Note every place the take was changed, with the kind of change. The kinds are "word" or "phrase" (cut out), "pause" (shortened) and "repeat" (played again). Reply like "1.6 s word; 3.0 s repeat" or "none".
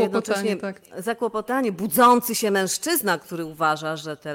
none